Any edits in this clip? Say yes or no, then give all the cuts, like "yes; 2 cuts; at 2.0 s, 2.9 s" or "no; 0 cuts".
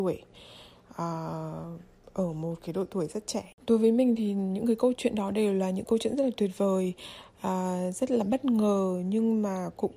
no; 0 cuts